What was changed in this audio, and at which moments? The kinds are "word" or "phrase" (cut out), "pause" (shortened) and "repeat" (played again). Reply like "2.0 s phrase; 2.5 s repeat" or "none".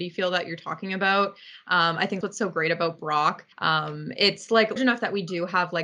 2.2 s word; 3.5 s pause; 4.8 s word